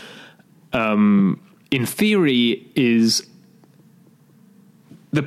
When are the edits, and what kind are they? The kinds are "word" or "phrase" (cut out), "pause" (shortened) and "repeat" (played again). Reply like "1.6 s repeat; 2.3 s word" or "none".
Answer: 1.6 s pause